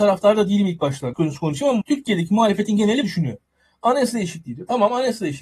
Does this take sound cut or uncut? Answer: cut